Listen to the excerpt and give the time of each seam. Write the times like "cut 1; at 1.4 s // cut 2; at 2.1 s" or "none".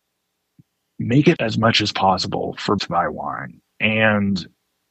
cut 1; at 1.4 s // cut 2; at 2.8 s // cut 3; at 3.7 s